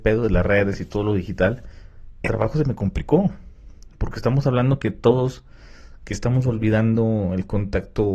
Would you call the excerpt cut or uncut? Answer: cut